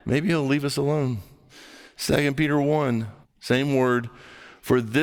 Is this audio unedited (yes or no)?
no